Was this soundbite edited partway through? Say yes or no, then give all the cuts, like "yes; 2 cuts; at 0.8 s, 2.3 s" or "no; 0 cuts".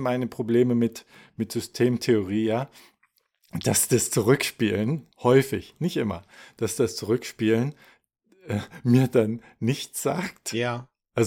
yes; 1 cut; at 5.1 s